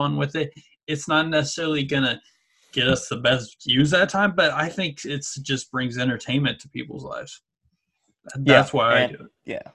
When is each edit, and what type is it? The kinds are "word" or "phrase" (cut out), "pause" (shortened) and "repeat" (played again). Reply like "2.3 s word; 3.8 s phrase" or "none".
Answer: none